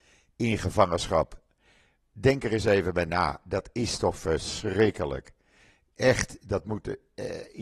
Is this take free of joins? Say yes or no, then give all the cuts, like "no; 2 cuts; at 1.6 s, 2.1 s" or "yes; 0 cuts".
yes; 0 cuts